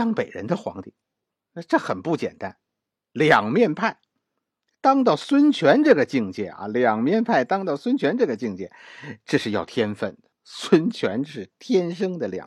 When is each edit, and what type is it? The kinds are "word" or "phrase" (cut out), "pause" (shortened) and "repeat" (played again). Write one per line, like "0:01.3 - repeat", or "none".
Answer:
0:10.3 - pause